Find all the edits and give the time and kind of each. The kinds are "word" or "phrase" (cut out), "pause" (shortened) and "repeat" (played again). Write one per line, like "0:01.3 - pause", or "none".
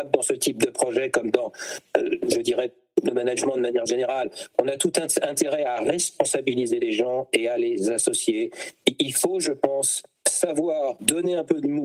none